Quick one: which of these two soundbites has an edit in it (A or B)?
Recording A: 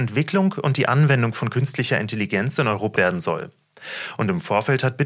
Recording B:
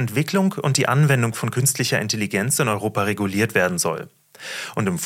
A